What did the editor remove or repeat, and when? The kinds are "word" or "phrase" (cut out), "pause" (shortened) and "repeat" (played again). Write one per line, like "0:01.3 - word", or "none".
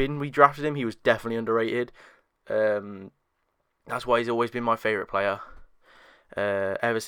none